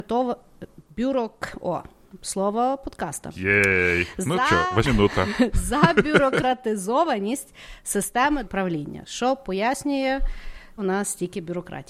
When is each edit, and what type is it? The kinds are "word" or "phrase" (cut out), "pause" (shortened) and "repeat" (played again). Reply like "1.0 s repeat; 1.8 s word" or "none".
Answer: 4.8 s word; 8.4 s word; 10.8 s word

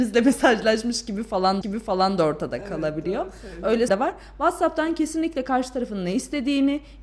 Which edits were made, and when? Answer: 1.6 s repeat; 3.9 s word

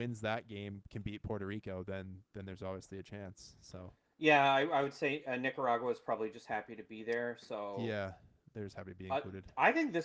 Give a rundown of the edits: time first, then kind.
none

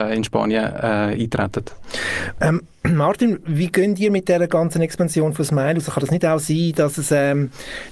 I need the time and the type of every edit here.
none

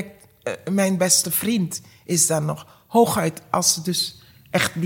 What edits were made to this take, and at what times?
none

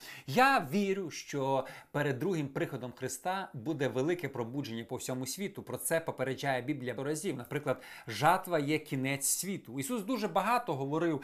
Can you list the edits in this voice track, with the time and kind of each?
7.0 s word

